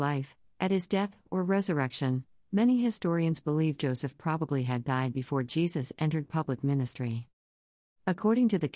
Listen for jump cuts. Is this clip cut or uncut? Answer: uncut